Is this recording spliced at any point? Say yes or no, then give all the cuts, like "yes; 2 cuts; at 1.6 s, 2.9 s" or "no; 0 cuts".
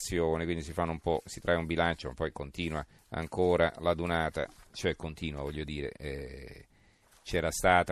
yes; 1 cut; at 3.0 s